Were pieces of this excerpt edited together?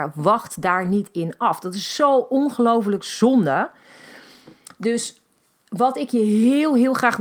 no; 0 cuts

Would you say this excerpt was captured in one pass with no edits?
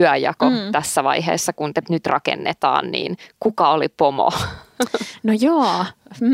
no; 1 cut; at 1.8 s

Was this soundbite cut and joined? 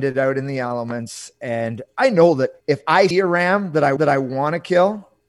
yes; 3 cuts; at 2.6 s, 3.1 s, 4.0 s

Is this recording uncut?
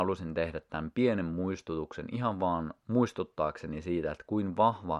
yes; 0 cuts

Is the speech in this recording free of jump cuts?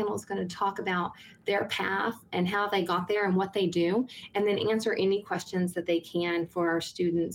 yes; 0 cuts

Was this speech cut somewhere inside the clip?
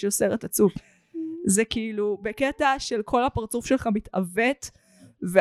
no; 0 cuts

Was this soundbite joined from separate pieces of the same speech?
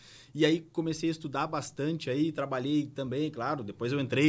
no; 0 cuts

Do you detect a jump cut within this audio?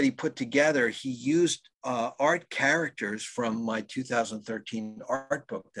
yes; 1 cut; at 1.7 s

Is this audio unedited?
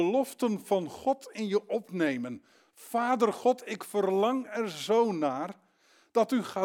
yes; 0 cuts

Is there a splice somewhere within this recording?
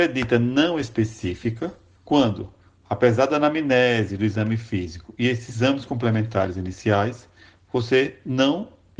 no; 0 cuts

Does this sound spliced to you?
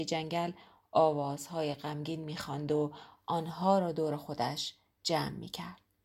no; 0 cuts

